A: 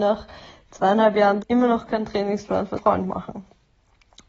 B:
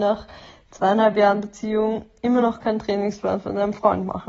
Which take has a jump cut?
A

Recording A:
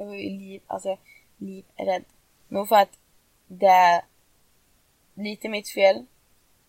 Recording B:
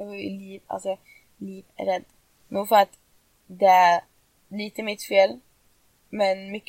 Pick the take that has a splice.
B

